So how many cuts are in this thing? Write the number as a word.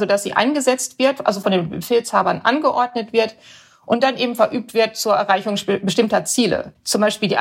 zero